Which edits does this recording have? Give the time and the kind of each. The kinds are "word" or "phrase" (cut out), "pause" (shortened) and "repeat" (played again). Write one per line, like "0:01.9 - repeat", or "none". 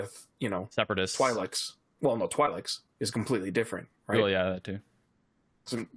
none

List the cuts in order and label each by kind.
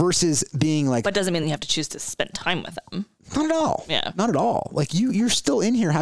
none

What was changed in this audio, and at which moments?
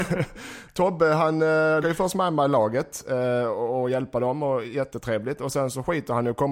0:01.8 - word

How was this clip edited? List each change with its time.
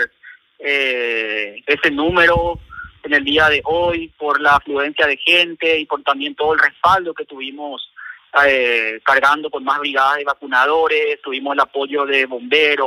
none

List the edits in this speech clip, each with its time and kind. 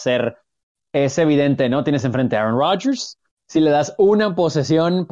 none

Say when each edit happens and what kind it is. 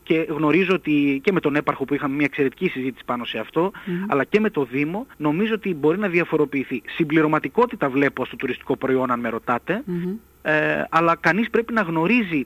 0:05.1 - pause

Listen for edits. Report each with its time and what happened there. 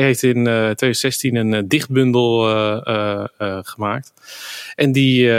none

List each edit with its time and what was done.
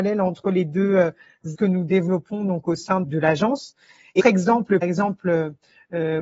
0:01.5 - word
0:03.0 - word
0:04.2 - word
0:04.8 - word

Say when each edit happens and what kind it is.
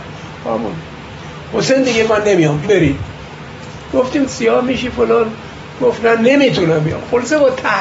0:02.1 - word
0:02.6 - word
0:04.3 - phrase

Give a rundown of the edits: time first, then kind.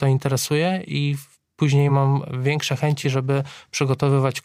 none

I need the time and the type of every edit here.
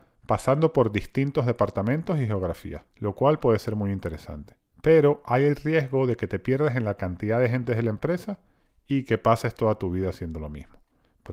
0:02.9 - pause

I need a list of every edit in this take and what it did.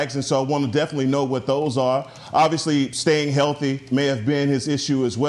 none

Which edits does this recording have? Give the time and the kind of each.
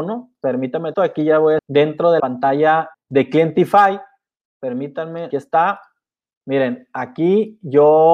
0:00.9 - word
0:01.6 - word
0:02.2 - word
0:02.9 - word
0:05.3 - word

